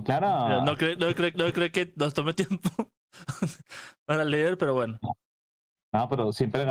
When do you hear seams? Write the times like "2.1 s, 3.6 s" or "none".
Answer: 1.3 s, 2.3 s